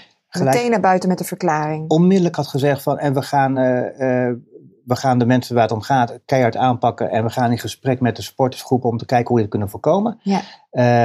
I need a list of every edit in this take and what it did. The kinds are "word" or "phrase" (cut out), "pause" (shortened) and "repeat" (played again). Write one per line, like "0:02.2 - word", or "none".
none

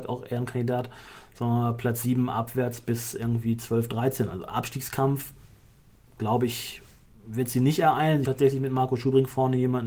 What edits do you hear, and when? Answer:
0:08.2 - word

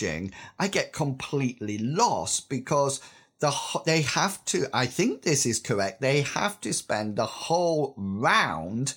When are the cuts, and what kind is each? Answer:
none

